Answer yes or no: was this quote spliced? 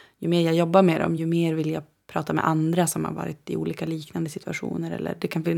no